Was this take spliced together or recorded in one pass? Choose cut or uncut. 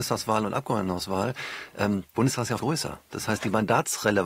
cut